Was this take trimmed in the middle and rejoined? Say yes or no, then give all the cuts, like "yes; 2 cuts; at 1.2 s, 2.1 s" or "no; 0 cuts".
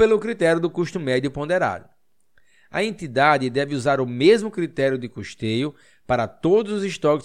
no; 0 cuts